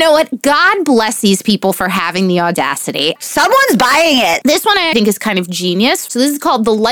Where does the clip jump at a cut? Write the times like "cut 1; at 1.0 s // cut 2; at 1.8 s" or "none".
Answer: cut 1; at 4.9 s